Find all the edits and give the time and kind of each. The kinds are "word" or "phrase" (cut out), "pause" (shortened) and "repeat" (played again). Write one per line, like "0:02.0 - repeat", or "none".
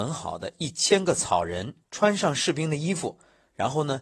0:01.8 - pause